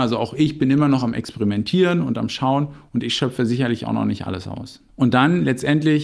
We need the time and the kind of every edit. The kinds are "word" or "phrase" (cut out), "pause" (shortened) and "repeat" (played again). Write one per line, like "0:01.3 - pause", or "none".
0:04.9 - pause